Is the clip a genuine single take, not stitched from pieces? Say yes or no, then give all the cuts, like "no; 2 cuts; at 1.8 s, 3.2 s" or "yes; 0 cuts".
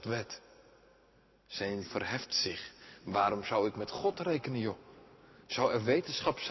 no; 1 cut; at 1.8 s